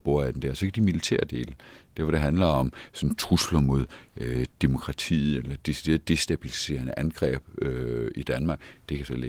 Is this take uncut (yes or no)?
yes